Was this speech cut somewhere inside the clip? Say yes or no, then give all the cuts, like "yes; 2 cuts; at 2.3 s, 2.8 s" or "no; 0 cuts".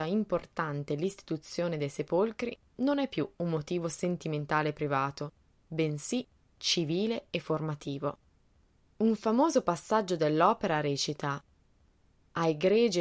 no; 0 cuts